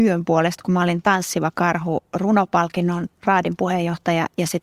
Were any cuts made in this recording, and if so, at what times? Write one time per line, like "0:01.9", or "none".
none